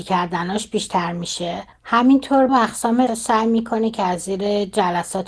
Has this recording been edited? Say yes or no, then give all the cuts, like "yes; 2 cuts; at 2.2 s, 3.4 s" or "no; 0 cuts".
yes; 2 cuts; at 2.5 s, 3.1 s